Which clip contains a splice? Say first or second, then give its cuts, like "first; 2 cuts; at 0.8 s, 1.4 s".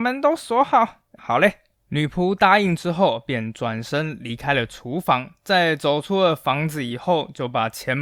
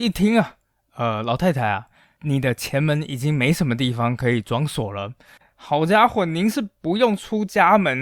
first; 2 cuts; at 1.2 s, 1.7 s